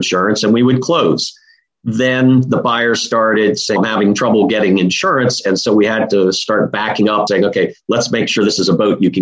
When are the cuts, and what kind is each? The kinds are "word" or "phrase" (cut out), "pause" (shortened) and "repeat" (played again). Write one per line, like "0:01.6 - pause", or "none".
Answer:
0:03.8 - word
0:07.3 - word